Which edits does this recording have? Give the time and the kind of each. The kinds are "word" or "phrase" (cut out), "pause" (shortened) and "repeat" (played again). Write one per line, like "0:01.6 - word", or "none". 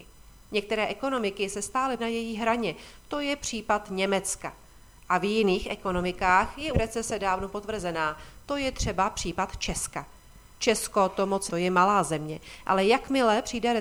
0:02.0 - word
0:06.7 - word
0:11.5 - word